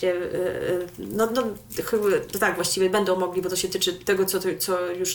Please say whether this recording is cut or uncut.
uncut